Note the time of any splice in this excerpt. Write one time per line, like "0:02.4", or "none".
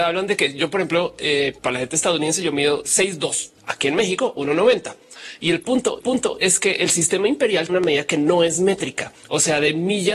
0:01.6
0:03.6
0:06.0
0:07.7
0:09.2